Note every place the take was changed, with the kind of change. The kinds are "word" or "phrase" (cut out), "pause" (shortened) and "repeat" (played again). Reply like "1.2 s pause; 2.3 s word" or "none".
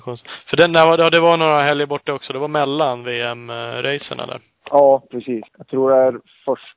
5.5 s pause